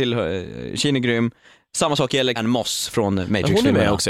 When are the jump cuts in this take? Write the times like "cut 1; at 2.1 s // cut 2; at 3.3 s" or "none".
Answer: cut 1; at 2.4 s